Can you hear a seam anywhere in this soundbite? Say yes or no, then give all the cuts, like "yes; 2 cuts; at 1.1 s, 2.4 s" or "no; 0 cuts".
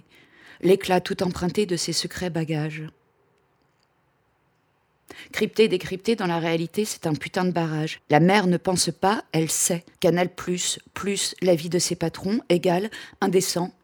yes; 2 cuts; at 8.0 s, 9.9 s